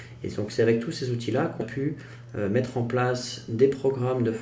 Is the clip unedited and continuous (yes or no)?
no